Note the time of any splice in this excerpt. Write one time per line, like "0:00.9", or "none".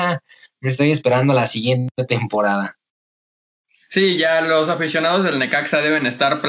none